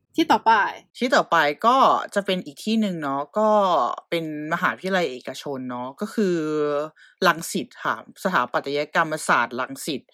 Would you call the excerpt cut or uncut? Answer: uncut